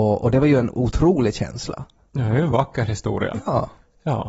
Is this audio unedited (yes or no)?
yes